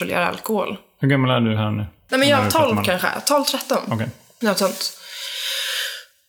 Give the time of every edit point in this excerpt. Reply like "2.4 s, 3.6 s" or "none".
none